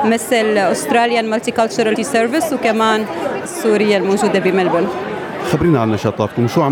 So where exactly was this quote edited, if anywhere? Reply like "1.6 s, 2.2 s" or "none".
2.0 s, 3.4 s